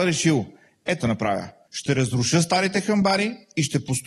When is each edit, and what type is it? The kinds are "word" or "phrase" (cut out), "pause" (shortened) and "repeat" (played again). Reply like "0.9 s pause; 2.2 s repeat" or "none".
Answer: 1.0 s phrase; 1.7 s pause